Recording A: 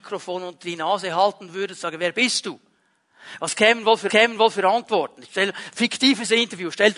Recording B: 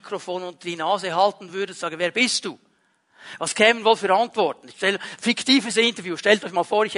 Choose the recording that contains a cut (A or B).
A